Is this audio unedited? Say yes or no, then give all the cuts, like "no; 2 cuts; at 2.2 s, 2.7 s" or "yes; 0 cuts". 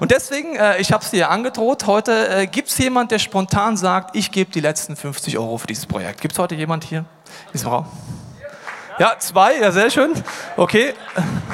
yes; 0 cuts